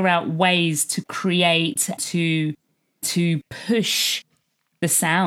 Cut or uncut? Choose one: cut